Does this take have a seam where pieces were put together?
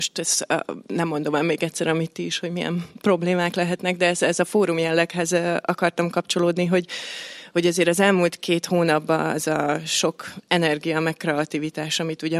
no; 0 cuts

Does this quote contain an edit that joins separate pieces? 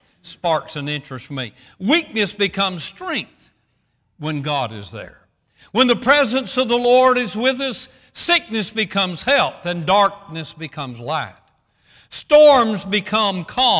no; 0 cuts

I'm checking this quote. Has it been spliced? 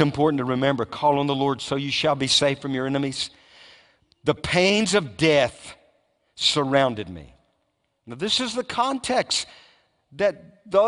no; 0 cuts

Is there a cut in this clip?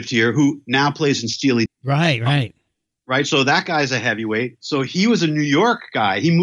yes; 1 cut; at 1.7 s

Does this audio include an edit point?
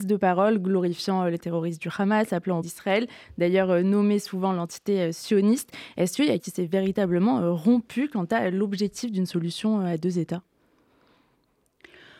yes; 2 cuts; at 2.6 s, 6.4 s

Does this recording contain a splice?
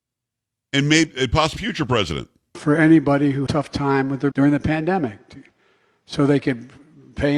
yes; 3 cuts; at 1.6 s, 3.5 s, 4.3 s

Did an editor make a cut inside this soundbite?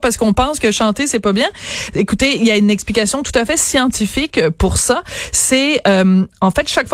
no; 0 cuts

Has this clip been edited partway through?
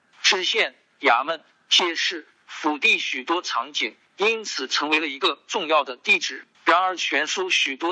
yes; 1 cut; at 6.5 s

